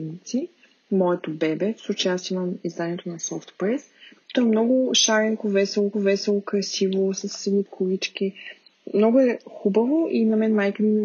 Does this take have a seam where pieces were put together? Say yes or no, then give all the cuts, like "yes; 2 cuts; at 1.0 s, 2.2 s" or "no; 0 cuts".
yes; 3 cuts; at 4.3 s, 5.9 s, 7.6 s